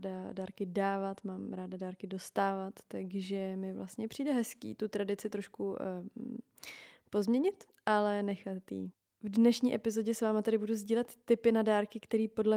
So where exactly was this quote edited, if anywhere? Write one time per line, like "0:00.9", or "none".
none